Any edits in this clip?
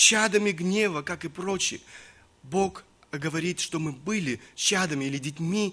no; 0 cuts

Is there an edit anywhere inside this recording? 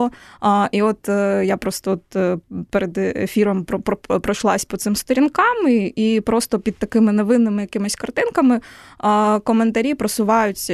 no; 0 cuts

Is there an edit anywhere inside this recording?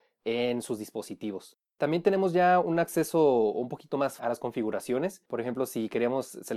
yes; 1 cut; at 4.2 s

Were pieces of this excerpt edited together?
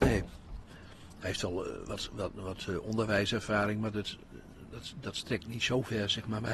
no; 0 cuts

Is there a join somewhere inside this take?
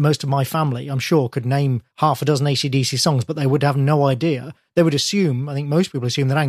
yes; 1 cut; at 1.9 s

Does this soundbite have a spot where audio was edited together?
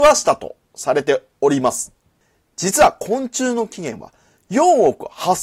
no; 0 cuts

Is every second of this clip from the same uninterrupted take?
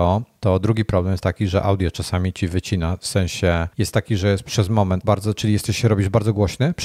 no; 2 cuts; at 3.7 s, 5.0 s

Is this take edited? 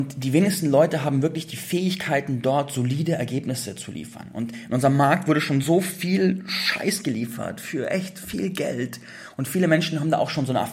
no; 0 cuts

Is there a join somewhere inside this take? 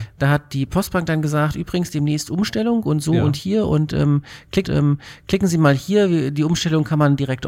yes; 1 cut; at 4.6 s

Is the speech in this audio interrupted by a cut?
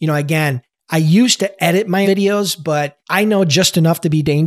yes; 2 cuts; at 2.0 s, 3.0 s

